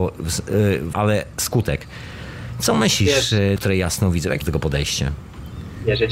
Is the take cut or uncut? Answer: cut